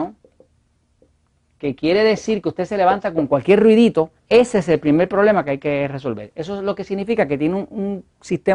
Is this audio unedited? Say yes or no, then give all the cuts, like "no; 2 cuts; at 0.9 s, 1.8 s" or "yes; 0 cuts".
no; 1 cut; at 4.2 s